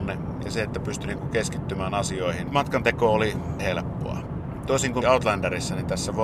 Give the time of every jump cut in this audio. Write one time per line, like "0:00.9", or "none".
0:03.6
0:05.0

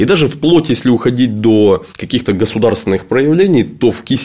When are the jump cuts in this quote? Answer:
0:01.9

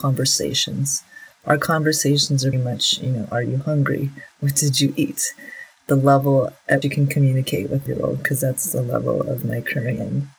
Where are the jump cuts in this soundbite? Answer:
0:02.5
0:06.8
0:07.9

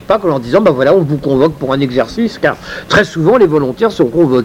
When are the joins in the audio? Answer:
none

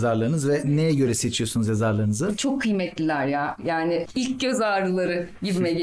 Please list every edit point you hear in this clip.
none

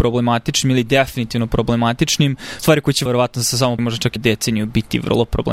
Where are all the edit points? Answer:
0:02.6
0:03.1
0:03.8
0:04.2

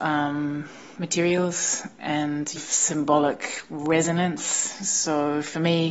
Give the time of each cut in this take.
0:02.6

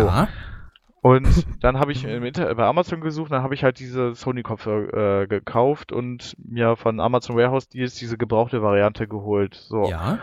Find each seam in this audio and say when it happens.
none

